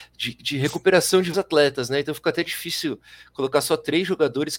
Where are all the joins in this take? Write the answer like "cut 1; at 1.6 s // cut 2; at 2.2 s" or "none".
cut 1; at 1.3 s